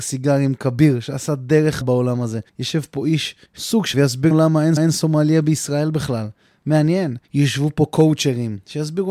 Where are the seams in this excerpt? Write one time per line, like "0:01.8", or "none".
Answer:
0:01.8
0:02.5
0:03.5
0:03.9
0:04.3
0:04.8
0:07.2

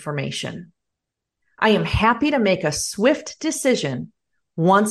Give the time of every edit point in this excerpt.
none

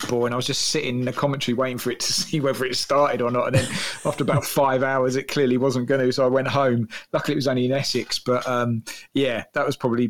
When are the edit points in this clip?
none

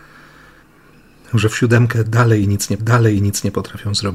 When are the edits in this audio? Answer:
0:02.8

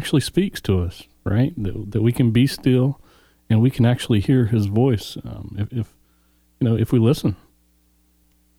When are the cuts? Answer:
none

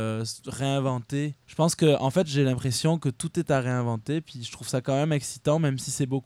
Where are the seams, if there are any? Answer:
0:01.4

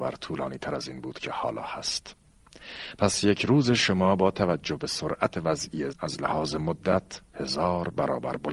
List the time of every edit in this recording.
0:05.3
0:05.9

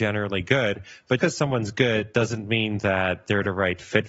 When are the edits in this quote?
0:01.2

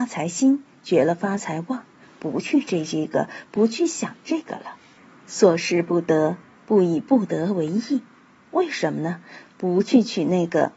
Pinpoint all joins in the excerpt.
none

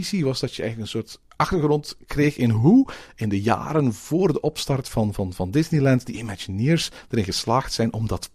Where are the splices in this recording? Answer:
none

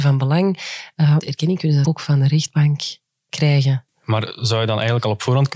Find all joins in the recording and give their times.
0:01.2
0:01.8

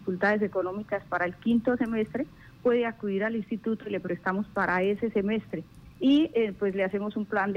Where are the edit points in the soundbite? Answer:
0:05.9

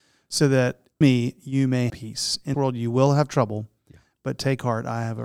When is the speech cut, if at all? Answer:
0:01.0
0:01.9
0:02.5

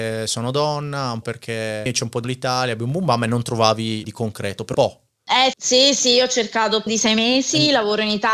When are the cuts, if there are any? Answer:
0:01.2
0:02.2
0:04.0
0:04.7
0:05.5
0:06.9

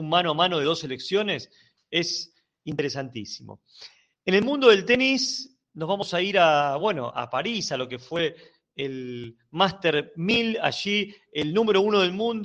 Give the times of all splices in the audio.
none

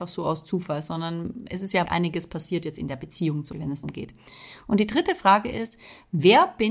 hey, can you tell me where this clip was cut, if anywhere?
0:01.9
0:03.5
0:03.8

